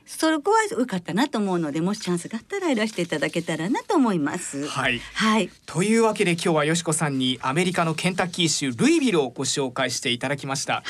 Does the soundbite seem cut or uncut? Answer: cut